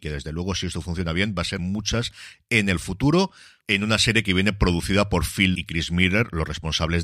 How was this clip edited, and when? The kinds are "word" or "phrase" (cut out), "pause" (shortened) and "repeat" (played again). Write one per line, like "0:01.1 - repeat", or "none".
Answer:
0:01.6 - phrase
0:05.5 - word